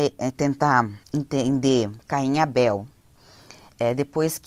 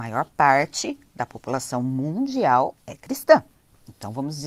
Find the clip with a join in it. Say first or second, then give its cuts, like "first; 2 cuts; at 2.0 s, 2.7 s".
first; 1 cut; at 1.0 s